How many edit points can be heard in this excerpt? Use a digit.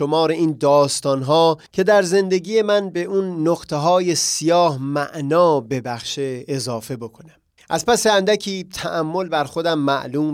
2